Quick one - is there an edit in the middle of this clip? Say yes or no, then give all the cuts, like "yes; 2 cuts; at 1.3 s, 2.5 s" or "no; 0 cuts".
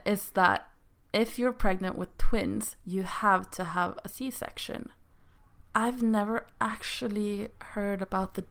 no; 0 cuts